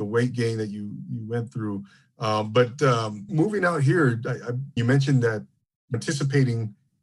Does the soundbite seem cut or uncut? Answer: cut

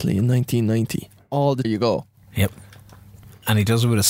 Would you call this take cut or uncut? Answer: cut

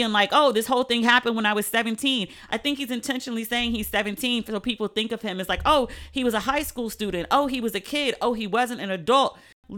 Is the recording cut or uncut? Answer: uncut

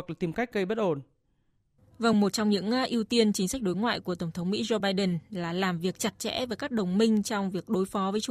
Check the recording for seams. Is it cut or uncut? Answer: uncut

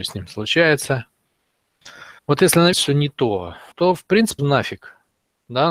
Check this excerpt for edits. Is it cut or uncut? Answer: cut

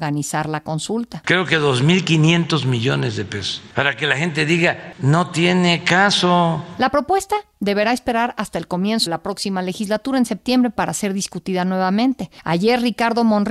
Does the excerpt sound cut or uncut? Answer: cut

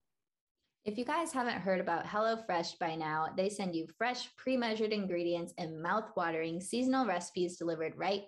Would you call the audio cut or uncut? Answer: uncut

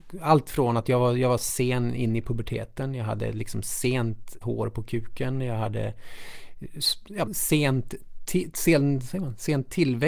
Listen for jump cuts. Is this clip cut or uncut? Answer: cut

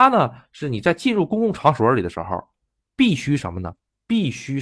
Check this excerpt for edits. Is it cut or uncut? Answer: uncut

